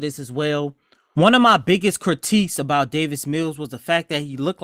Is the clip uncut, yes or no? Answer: yes